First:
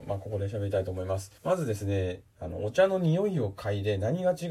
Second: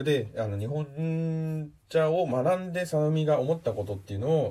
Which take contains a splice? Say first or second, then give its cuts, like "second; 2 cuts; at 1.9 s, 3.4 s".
first; 1 cut; at 1.4 s